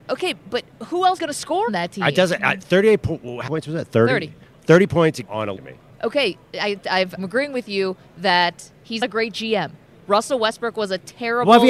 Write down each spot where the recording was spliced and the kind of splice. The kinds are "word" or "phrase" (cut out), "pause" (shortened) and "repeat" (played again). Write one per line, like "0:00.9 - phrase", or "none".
0:01.2 - word
0:01.7 - word
0:03.5 - word
0:05.2 - word
0:05.6 - phrase
0:07.2 - word
0:09.0 - word

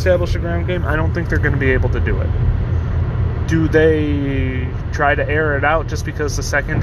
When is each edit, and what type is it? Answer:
none

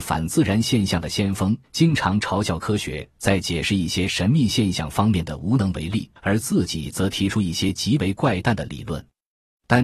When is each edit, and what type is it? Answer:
0:01.6 - pause
0:06.2 - pause

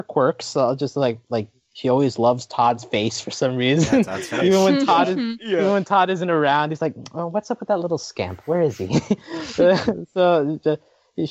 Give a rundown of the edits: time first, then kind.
none

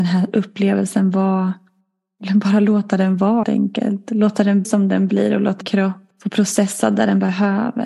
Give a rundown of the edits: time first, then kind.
0:03.4 - word
0:04.6 - word
0:05.6 - word

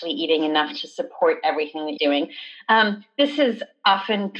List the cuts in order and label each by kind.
0:02.0 - phrase

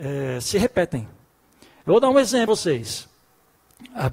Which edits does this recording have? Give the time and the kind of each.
0:01.4 - pause
0:02.5 - word

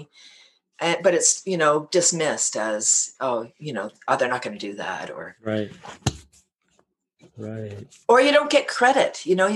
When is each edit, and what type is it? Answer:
none

